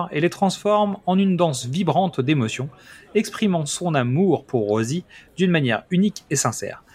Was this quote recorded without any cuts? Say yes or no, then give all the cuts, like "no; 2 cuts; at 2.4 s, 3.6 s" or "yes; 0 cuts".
yes; 0 cuts